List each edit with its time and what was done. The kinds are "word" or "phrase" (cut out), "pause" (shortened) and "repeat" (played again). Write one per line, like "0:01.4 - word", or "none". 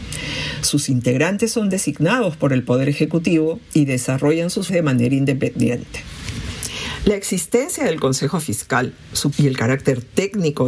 0:04.7 - word
0:09.3 - word

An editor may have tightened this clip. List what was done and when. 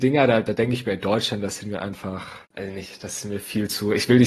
0:02.4 - pause

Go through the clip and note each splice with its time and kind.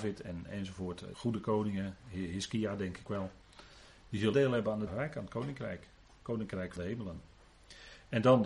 0:01.1 - word
0:03.1 - word
0:04.3 - phrase
0:04.9 - word
0:06.8 - word

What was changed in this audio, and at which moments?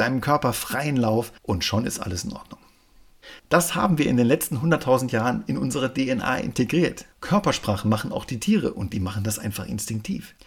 0:01.4 - pause
0:03.4 - pause
0:07.1 - pause

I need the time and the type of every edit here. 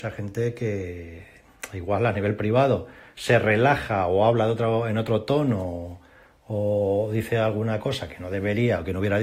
none

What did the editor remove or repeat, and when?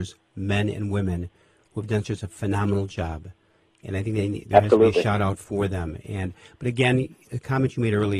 none

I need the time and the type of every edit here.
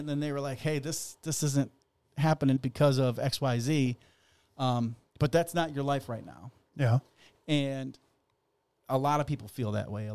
0:02.6 - word

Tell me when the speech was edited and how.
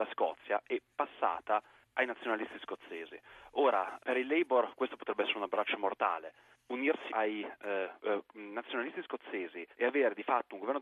0:04.0 - word
0:07.1 - word
0:08.0 - pause
0:09.7 - pause

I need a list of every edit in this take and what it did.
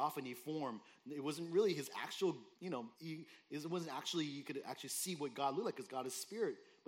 0:02.5 - pause
0:02.9 - pause

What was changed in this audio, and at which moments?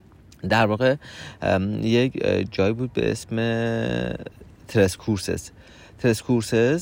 none

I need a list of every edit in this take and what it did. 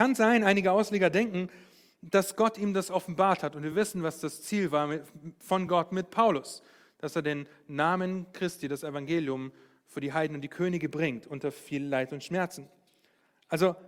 none

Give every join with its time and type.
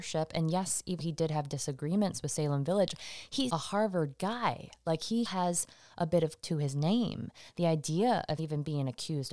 0:01.0 - word
0:03.5 - word
0:05.3 - word
0:06.4 - word
0:08.4 - word

